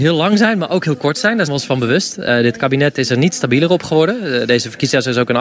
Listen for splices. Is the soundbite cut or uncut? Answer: cut